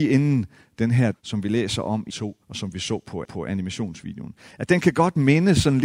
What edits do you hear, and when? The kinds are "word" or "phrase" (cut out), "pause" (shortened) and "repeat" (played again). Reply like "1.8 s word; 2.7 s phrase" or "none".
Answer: 1.1 s phrase; 2.1 s phrase; 2.4 s pause; 3.2 s repeat